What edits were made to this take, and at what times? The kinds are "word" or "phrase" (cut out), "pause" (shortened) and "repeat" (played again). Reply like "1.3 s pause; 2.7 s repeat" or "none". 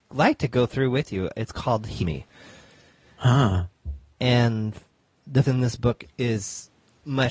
2.0 s word; 5.4 s word